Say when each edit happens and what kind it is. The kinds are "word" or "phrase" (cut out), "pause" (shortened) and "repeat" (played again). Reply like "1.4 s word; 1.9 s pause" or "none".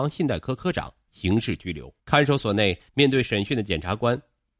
2.0 s pause; 2.9 s pause